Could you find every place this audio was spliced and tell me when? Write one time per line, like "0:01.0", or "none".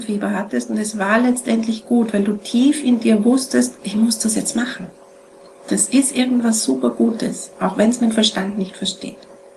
none